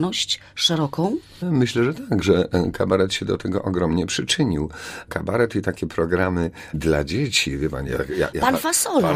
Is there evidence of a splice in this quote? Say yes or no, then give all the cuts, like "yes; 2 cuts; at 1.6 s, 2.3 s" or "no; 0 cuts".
no; 0 cuts